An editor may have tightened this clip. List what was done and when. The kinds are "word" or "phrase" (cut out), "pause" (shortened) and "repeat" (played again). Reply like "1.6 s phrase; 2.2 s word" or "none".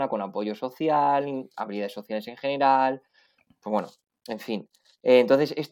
none